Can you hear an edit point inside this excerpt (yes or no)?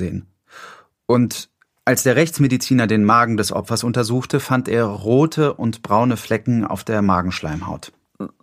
no